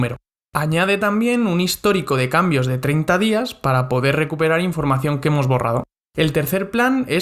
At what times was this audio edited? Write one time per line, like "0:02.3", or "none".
none